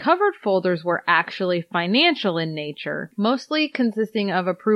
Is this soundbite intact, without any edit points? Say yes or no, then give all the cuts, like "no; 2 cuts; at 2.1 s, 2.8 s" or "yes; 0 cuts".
yes; 0 cuts